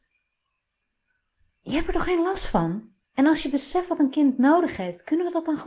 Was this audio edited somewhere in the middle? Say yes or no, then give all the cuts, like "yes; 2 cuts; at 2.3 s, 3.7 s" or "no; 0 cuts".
yes; 1 cut; at 3.0 s